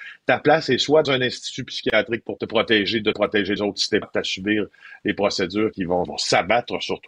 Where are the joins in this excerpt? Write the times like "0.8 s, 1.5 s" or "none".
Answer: 1.0 s, 2.4 s, 3.1 s, 3.6 s, 4.0 s, 5.7 s, 6.0 s